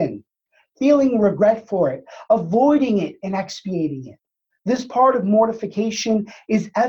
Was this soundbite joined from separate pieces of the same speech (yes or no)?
yes